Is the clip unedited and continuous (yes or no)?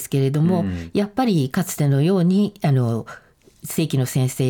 yes